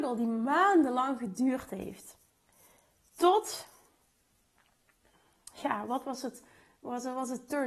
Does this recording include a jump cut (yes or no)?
no